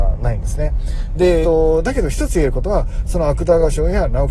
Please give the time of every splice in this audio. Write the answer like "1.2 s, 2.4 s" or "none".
1.4 s